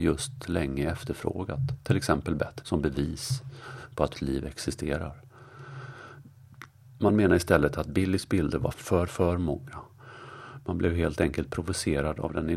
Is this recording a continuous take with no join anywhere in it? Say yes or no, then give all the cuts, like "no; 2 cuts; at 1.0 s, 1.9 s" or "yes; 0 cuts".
no; 4 cuts; at 2.6 s, 4.1 s, 8.7 s, 9.1 s